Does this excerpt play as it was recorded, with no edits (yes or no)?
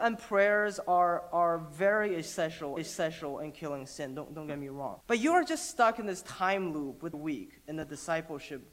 no